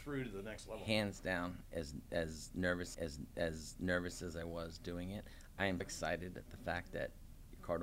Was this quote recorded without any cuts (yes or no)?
no